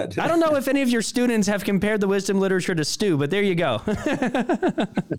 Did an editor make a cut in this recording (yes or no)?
no